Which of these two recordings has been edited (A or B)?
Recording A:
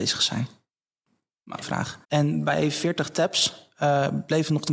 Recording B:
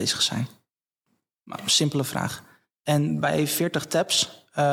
A